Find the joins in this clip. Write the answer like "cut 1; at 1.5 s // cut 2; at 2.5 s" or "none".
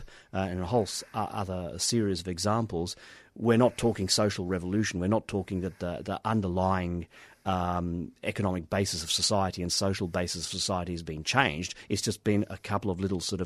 none